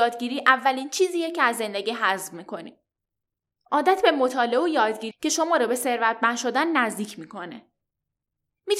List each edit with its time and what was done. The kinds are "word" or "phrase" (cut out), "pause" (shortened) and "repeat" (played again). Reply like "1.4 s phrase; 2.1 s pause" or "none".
5.1 s phrase